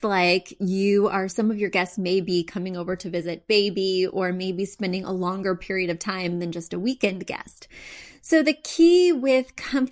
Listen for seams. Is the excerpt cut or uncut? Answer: cut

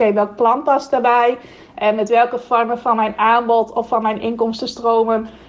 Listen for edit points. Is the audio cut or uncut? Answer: uncut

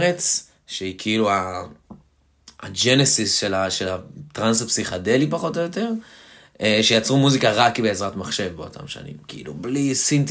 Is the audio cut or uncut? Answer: uncut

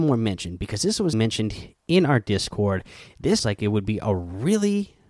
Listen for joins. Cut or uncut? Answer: cut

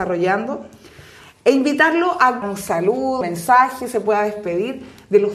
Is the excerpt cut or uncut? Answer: cut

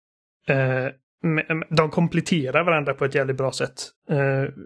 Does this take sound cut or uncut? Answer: uncut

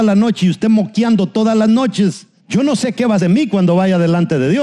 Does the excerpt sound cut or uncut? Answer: cut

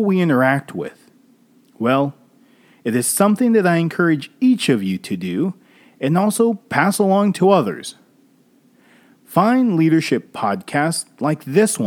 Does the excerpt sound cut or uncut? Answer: uncut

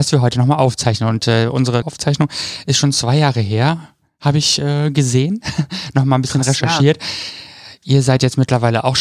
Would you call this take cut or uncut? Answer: cut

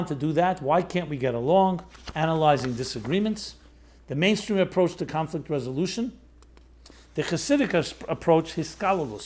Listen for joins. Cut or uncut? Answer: uncut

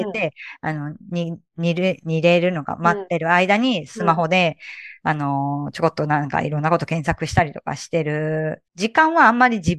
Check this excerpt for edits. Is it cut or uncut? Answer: cut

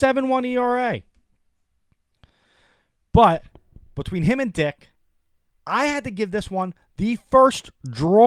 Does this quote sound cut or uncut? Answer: uncut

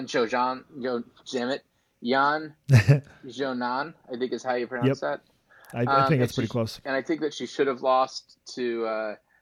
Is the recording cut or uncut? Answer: uncut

